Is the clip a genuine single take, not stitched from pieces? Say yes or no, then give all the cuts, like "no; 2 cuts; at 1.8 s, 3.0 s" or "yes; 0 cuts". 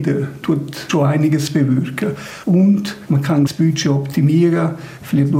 yes; 0 cuts